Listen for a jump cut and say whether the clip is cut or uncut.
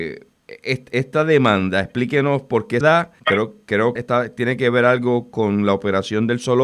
cut